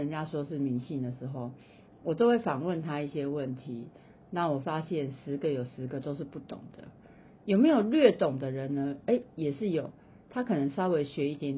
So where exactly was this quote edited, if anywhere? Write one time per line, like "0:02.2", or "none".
none